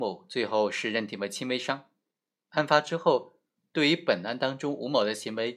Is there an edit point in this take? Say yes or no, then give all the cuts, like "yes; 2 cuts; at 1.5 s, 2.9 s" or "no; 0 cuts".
no; 0 cuts